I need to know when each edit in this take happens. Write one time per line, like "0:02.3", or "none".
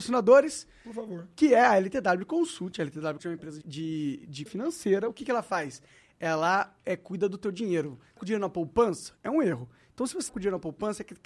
0:03.2
0:03.6
0:04.5
0:08.2
0:10.3